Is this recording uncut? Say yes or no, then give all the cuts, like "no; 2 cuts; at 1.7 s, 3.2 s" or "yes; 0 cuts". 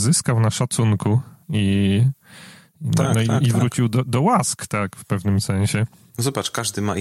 yes; 0 cuts